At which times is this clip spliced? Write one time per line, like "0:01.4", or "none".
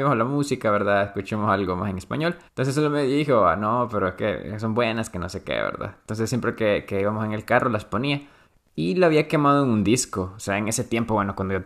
0:02.5
0:08.4